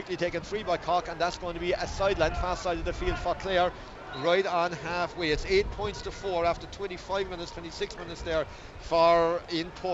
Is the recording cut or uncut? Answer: uncut